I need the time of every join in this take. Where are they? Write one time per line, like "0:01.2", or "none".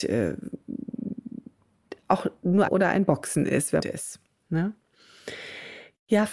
0:02.7
0:03.8